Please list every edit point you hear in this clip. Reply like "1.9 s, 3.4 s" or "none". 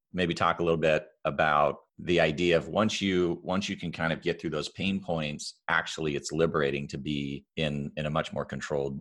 1.9 s, 7.5 s